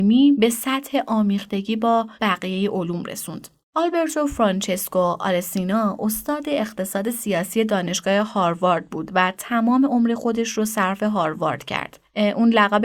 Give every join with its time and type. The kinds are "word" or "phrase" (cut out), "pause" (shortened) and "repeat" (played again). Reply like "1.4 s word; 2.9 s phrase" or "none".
2.1 s pause